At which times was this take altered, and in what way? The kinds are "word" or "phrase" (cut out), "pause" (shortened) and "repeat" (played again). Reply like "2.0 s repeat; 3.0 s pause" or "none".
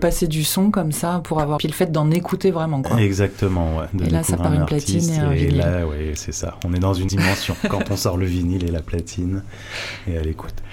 1.6 s phrase; 4.4 s word; 7.1 s word